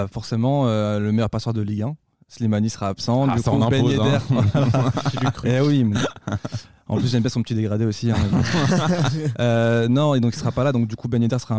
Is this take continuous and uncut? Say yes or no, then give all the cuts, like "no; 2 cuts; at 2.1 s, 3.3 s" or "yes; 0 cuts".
yes; 0 cuts